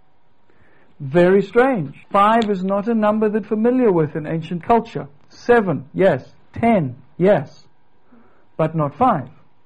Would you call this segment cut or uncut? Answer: cut